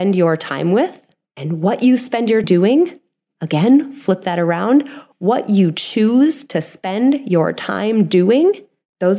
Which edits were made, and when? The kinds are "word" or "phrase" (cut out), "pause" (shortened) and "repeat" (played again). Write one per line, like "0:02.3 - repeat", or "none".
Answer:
0:02.4 - word